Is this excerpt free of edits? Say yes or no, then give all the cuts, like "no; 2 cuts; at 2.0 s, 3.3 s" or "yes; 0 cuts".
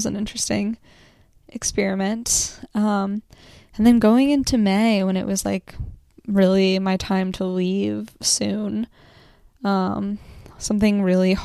yes; 0 cuts